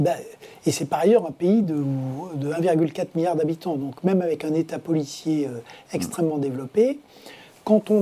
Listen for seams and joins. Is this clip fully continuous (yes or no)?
yes